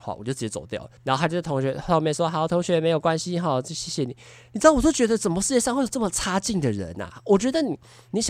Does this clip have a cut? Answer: yes; 1 cut; at 1.0 s

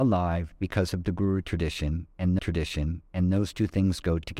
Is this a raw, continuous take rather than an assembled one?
no; 1 cut; at 2.4 s

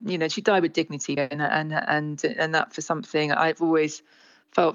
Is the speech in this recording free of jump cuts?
no; 1 cut; at 1.2 s

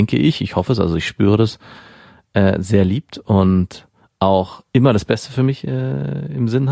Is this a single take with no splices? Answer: yes; 0 cuts

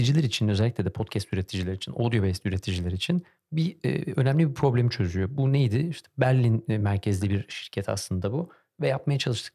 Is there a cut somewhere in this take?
no; 0 cuts

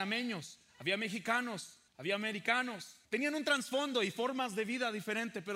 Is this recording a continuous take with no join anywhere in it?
no; 2 cuts; at 1.9 s, 3.0 s

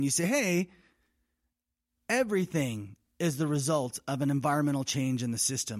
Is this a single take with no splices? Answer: yes; 0 cuts

